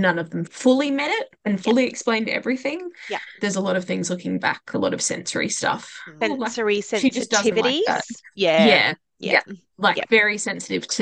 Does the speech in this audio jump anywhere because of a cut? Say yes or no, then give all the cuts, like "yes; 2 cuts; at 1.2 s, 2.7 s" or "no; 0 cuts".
no; 0 cuts